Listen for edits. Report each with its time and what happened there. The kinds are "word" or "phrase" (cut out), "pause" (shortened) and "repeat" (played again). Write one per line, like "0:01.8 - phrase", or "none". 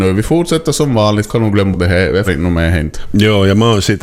0:01.3 - word
0:01.7 - word
0:02.2 - word